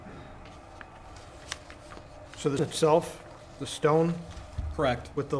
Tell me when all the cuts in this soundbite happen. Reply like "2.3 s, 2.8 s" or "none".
2.6 s